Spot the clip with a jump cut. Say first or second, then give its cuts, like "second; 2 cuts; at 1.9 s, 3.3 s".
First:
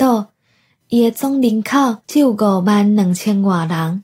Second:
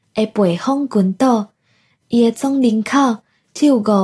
first; 1 cut; at 2.0 s